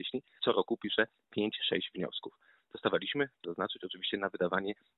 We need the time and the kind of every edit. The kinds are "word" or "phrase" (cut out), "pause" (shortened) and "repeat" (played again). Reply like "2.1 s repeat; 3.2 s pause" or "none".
3.4 s word